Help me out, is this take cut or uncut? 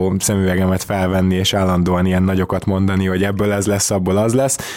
uncut